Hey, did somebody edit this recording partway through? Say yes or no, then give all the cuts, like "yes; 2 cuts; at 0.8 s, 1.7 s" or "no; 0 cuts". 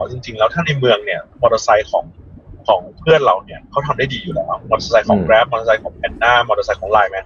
yes; 1 cut; at 1.3 s